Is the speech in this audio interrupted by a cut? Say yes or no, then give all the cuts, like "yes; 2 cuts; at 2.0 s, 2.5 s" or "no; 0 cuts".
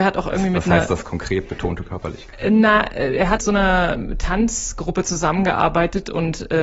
yes; 1 cut; at 3.4 s